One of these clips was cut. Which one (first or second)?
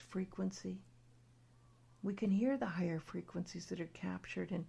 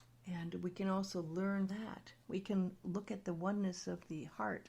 second